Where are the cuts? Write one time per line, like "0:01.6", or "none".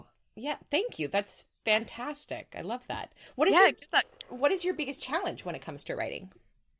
none